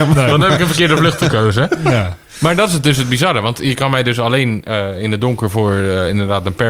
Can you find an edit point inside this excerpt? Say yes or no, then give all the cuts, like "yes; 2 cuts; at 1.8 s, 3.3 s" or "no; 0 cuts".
no; 0 cuts